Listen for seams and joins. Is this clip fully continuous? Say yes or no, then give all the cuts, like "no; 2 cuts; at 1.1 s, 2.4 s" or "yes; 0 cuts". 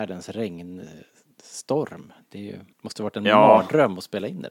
no; 1 cut; at 2.7 s